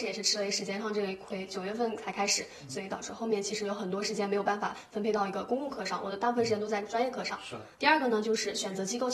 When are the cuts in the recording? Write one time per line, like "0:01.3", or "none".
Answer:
0:07.7